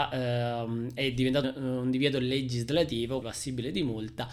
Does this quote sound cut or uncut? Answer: cut